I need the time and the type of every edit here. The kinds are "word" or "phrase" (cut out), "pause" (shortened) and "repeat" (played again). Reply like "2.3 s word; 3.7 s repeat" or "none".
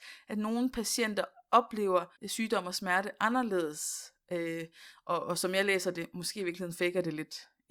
2.2 s pause